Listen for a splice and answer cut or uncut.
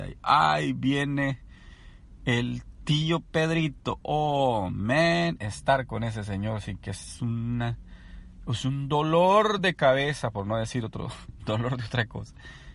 uncut